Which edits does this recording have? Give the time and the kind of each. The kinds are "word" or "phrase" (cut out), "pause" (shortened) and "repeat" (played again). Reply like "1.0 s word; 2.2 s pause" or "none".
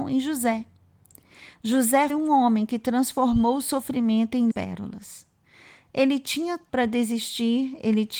2.1 s word; 4.5 s word; 6.7 s word